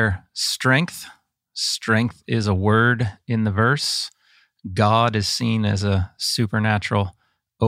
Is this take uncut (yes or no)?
yes